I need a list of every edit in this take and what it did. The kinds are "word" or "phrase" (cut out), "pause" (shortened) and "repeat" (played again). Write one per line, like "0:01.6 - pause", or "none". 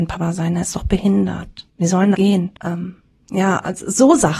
0:01.7 - pause
0:02.1 - word
0:02.6 - pause